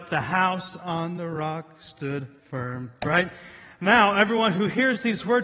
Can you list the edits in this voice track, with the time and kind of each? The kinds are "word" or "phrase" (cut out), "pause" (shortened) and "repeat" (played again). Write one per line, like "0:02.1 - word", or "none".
0:02.4 - pause